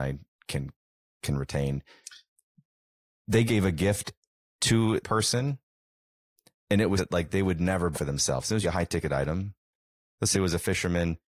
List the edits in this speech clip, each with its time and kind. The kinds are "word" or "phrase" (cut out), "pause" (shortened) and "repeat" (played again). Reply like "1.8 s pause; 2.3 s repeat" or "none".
3.5 s word; 5.0 s word; 7.0 s word; 7.9 s word; 8.6 s word; 10.3 s word